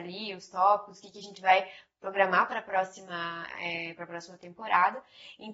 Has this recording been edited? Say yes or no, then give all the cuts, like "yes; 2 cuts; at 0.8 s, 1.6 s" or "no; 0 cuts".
no; 0 cuts